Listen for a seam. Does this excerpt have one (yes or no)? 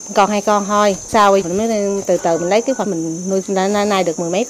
yes